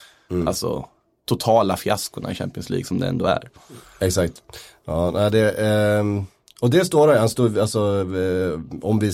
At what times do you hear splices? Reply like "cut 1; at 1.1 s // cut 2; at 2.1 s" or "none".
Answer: none